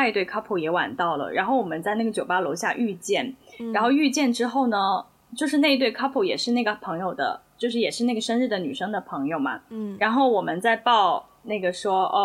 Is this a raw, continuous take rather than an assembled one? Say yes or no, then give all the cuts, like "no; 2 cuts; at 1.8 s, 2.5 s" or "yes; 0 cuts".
yes; 0 cuts